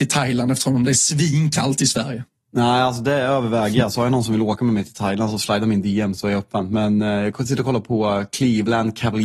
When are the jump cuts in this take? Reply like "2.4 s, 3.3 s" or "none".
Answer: none